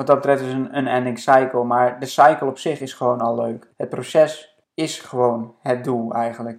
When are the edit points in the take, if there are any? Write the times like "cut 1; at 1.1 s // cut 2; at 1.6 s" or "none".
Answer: cut 1; at 3.7 s // cut 2; at 4.6 s

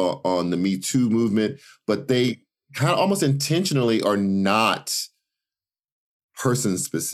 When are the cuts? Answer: none

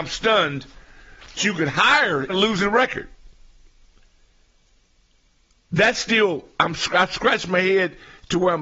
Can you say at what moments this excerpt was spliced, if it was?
cut 1; at 1.4 s // cut 2; at 2.3 s

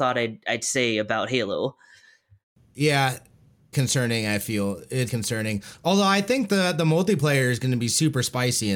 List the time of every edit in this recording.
cut 1; at 2.6 s // cut 2; at 3.7 s // cut 3; at 5.1 s

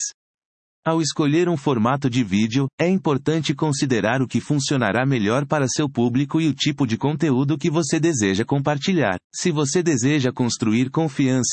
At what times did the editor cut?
cut 1; at 9.2 s

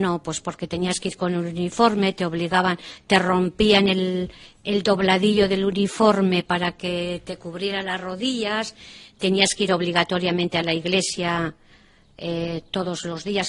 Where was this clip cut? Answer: none

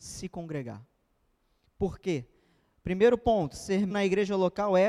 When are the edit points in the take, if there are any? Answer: cut 1; at 3.9 s

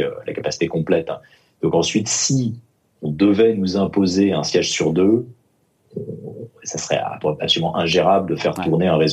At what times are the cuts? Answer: none

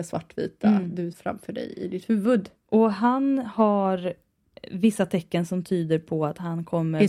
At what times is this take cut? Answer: cut 1; at 1.1 s

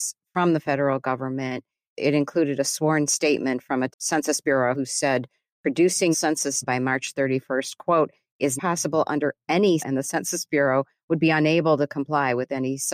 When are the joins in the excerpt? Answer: cut 1; at 3.9 s // cut 2; at 4.7 s // cut 3; at 6.1 s // cut 4; at 6.6 s // cut 5; at 8.6 s // cut 6; at 9.8 s

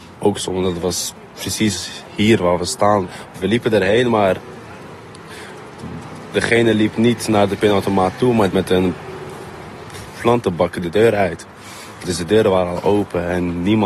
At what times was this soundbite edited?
cut 1; at 8.5 s

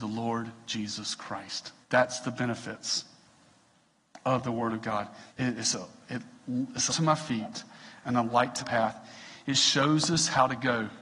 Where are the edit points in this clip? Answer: cut 1; at 1.8 s // cut 2; at 5.3 s // cut 3; at 6.9 s // cut 4; at 8.6 s

